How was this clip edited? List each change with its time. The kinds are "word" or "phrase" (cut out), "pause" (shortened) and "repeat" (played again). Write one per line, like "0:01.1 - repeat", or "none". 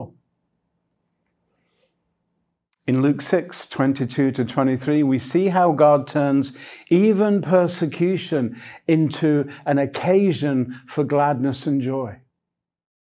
none